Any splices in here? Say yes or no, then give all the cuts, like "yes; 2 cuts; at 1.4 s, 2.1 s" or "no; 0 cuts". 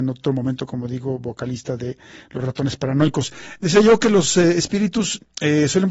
no; 0 cuts